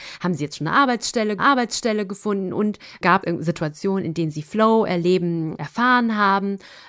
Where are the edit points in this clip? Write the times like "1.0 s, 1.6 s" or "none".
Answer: 1.4 s, 3.2 s, 5.6 s